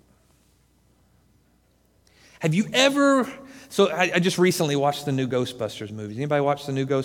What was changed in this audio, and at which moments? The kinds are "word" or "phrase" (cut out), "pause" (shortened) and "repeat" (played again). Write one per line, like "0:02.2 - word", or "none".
none